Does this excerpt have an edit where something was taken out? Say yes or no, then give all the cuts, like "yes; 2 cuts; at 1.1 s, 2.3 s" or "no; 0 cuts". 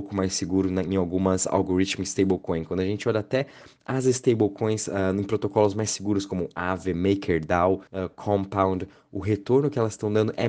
yes; 1 cut; at 7.9 s